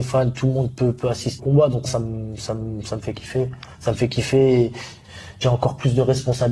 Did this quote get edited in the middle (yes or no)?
yes